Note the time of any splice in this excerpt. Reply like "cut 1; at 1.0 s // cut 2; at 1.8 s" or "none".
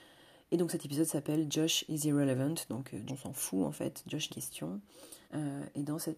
cut 1; at 3.1 s // cut 2; at 4.3 s // cut 3; at 5.2 s